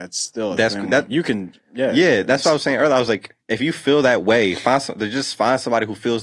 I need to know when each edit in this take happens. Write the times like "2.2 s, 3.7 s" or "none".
3.4 s